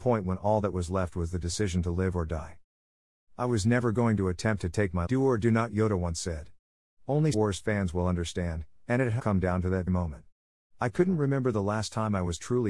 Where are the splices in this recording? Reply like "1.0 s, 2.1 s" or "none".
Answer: 5.1 s, 7.3 s, 9.2 s, 9.9 s